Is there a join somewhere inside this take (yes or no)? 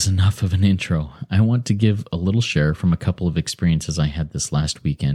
no